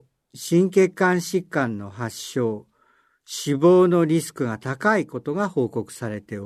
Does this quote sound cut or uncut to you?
uncut